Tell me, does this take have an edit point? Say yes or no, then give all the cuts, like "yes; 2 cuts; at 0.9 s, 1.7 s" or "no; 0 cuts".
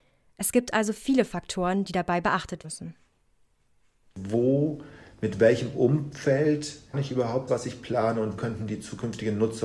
yes; 4 cuts; at 2.6 s, 6.9 s, 7.5 s, 8.4 s